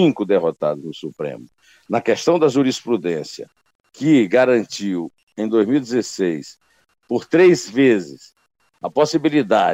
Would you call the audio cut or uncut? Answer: uncut